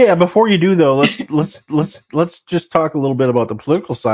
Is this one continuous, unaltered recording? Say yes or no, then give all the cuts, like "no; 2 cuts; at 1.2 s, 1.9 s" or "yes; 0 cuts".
no; 1 cut; at 1.7 s